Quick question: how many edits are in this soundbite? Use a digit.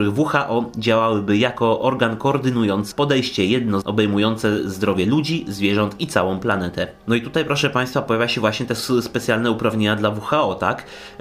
2